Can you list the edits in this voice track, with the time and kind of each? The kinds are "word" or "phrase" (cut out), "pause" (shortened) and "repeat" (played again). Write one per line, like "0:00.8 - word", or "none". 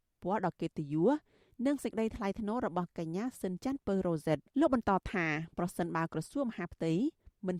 0:04.5 - pause